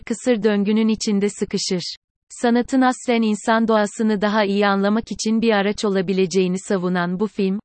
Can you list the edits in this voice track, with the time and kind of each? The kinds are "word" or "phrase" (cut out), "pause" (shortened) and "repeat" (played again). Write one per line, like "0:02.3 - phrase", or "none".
none